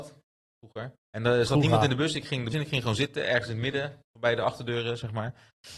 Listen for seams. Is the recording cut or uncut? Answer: cut